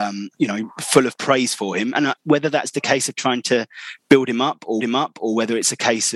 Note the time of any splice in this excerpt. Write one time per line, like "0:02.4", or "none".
0:02.2
0:02.7
0:04.8